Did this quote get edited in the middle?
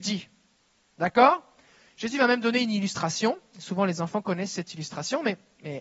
no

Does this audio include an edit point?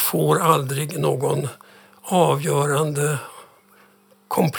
no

